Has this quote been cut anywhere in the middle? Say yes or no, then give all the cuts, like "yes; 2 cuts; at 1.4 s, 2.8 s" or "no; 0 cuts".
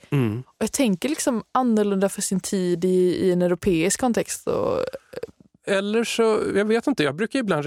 no; 0 cuts